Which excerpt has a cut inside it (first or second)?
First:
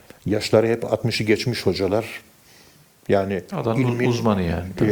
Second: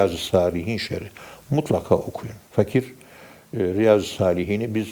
second